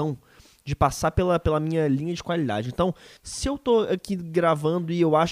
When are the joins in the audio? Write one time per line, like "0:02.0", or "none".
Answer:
0:03.2